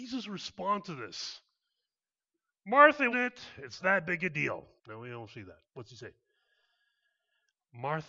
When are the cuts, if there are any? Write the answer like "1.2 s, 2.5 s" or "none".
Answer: 3.1 s, 3.8 s, 4.8 s, 5.6 s

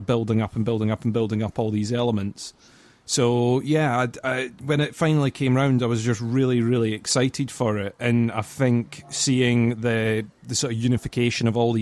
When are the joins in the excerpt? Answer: none

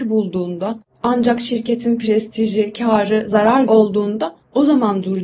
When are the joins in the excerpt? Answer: 3.7 s

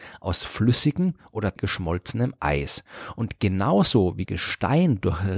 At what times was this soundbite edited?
1.6 s, 4.3 s

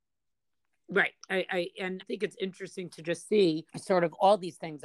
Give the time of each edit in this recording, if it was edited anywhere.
2.0 s, 3.7 s

